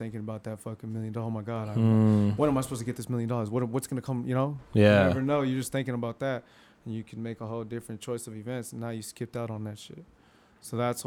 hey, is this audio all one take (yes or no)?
yes